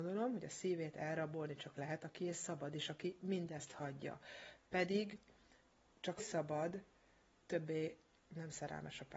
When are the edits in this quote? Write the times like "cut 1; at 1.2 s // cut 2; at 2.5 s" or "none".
cut 1; at 1.7 s // cut 2; at 6.2 s // cut 3; at 7.4 s